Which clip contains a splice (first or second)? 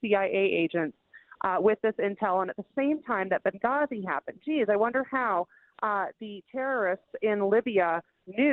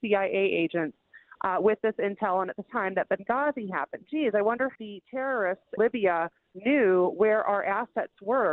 second